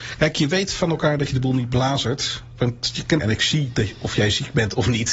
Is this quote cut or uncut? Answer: cut